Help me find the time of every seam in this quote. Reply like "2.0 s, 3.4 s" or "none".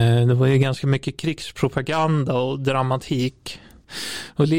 none